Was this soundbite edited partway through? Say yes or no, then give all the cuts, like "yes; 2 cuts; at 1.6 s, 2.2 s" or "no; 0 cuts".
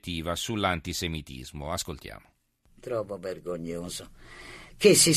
no; 0 cuts